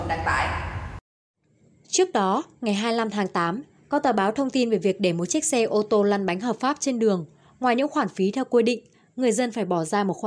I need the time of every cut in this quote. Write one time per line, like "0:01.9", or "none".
none